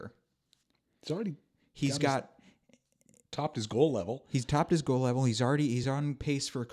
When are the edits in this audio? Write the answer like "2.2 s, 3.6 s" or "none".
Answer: none